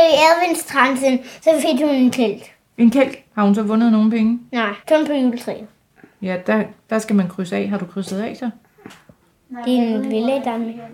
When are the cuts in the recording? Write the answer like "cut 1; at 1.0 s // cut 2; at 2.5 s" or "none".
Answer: cut 1; at 4.8 s